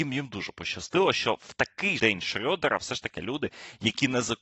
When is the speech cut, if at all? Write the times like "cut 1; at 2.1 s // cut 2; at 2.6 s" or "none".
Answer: cut 1; at 2.0 s // cut 2; at 3.2 s